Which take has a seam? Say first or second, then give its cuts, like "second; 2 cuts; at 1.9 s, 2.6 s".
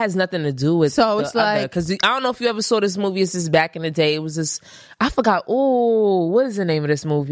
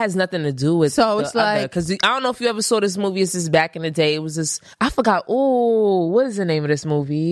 second; 1 cut; at 4.7 s